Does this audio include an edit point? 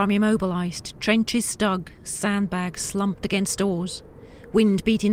no; 0 cuts

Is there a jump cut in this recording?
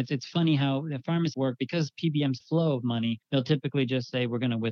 yes; 3 cuts; at 1.3 s, 2.4 s, 3.2 s

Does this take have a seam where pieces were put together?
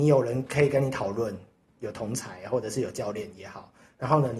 no; 0 cuts

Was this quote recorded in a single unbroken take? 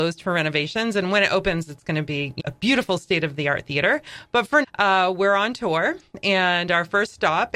no; 2 cuts; at 2.4 s, 4.6 s

